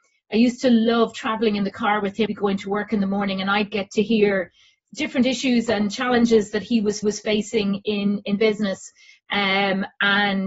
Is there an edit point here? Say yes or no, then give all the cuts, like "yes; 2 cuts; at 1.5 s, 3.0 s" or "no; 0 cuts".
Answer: yes; 2 cuts; at 2.3 s, 7.0 s